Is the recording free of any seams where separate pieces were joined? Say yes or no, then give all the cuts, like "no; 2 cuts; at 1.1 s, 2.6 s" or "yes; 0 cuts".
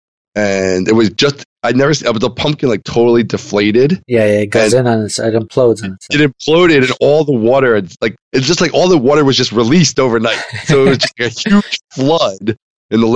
no; 1 cut; at 8.2 s